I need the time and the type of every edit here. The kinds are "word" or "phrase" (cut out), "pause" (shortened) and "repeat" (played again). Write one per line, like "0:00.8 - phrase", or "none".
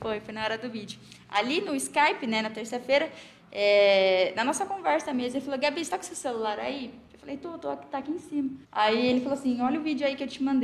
0:08.6 - pause